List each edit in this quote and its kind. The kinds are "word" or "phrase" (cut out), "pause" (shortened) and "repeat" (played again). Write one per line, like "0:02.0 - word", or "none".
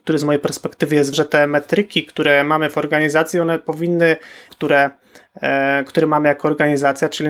0:01.1 - word
0:04.5 - phrase